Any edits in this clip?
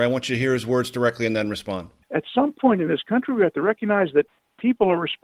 no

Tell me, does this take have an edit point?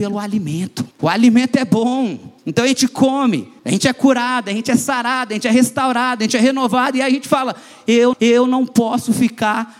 yes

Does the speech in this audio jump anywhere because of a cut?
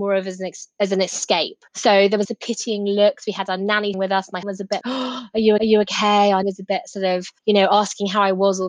yes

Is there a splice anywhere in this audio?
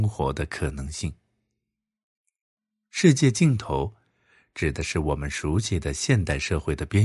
no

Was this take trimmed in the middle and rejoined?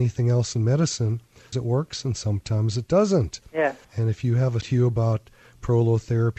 yes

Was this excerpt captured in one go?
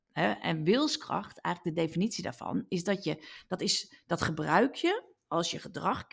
yes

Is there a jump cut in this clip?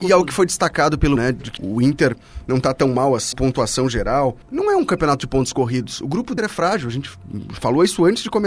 yes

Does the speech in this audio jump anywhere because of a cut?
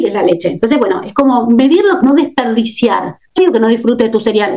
yes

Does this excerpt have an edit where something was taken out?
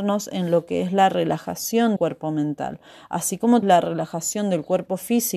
yes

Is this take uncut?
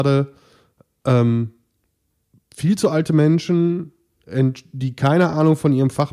yes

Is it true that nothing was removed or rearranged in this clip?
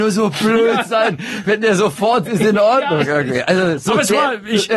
no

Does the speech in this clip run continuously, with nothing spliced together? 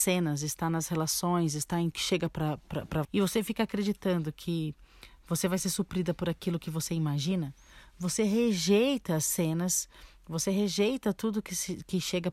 no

